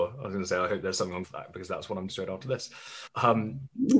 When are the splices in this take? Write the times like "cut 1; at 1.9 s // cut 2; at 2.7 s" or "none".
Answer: cut 1; at 1.2 s // cut 2; at 2.1 s // cut 3; at 3.1 s